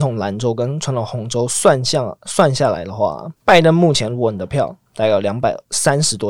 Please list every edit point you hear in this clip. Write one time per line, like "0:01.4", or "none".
0:03.4